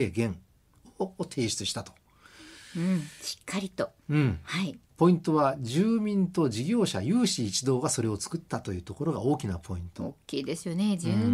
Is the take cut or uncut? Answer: uncut